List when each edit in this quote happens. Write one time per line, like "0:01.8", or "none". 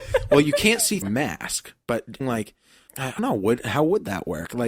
0:01.0
0:02.2
0:02.9
0:03.2